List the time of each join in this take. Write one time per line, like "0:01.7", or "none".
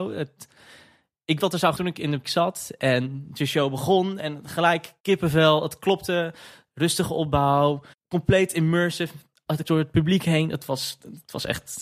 0:01.4
0:01.8
0:02.2
0:05.0
0:07.9
0:09.6